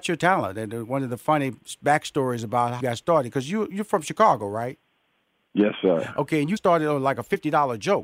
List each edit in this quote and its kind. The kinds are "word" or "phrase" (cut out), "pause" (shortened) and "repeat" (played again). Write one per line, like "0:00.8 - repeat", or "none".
0:02.8 - word
0:06.6 - word